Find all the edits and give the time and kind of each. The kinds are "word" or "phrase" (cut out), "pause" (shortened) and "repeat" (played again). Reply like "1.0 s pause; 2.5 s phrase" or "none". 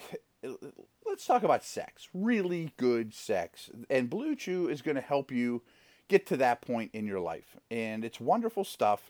none

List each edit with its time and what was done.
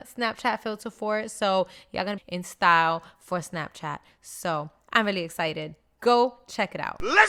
2.2 s phrase

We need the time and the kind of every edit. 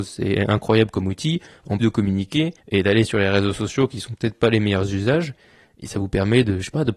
1.8 s word; 2.6 s pause

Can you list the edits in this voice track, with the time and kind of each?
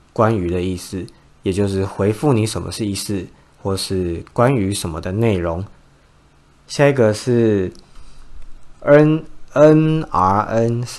none

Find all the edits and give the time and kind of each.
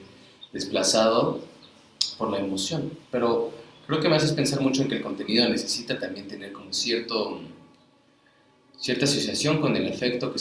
3.0 s pause

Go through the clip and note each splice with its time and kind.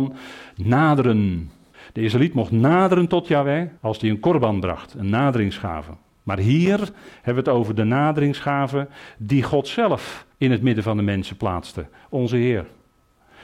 1.7 s pause; 3.8 s pause; 10.3 s pause

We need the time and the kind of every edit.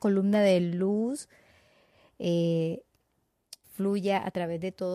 3.6 s word

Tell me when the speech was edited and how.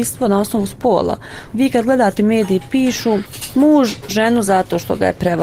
2.2 s phrase; 4.1 s word

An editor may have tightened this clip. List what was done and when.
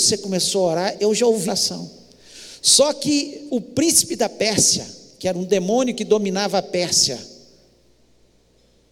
1.5 s word

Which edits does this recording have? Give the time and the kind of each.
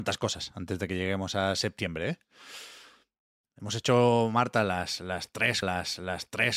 5.6 s repeat

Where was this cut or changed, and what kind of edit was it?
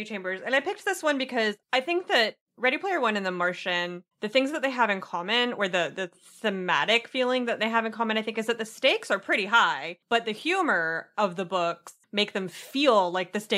1.6 s pause; 2.5 s pause; 4.1 s pause; 10.0 s pause; 12.0 s pause

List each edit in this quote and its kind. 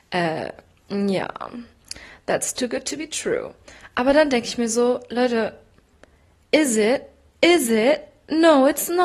none

